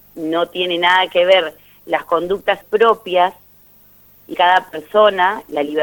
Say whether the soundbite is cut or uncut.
cut